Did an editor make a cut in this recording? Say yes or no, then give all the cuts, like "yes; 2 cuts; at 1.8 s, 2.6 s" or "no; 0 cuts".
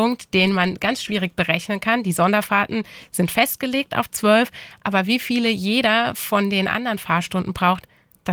no; 0 cuts